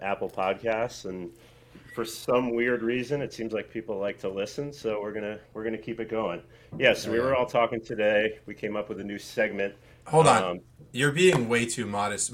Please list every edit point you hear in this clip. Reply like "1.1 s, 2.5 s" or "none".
none